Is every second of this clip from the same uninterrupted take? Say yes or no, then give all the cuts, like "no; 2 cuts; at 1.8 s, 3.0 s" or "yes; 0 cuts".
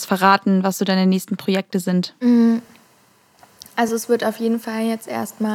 yes; 0 cuts